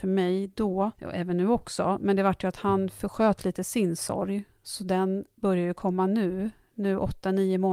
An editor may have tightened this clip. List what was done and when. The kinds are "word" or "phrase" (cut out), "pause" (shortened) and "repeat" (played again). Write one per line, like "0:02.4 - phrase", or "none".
0:00.9 - pause